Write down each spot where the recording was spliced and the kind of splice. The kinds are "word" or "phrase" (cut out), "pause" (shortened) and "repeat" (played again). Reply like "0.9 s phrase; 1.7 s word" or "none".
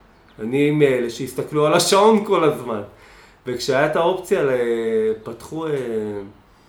none